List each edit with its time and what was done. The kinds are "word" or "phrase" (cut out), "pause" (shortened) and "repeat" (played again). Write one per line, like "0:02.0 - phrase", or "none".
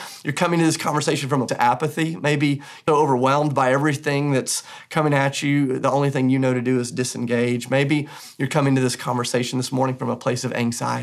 0:01.5 - word
0:02.9 - word